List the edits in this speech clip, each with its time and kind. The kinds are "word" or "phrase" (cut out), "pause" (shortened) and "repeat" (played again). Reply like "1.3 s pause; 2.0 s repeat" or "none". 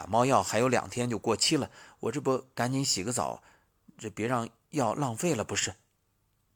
none